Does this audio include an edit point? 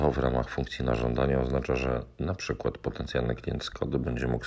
no; 0 cuts

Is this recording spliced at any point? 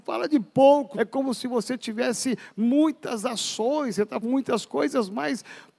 yes; 2 cuts; at 0.9 s, 4.2 s

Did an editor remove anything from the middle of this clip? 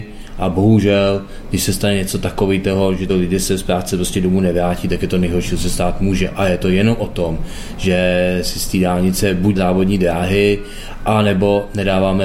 yes; 2 cuts; at 3.1 s, 9.6 s

